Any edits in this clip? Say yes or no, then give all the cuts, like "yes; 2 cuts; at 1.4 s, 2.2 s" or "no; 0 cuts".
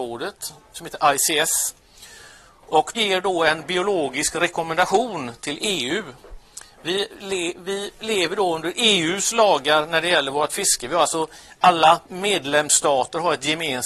yes; 2 cuts; at 2.9 s, 12.0 s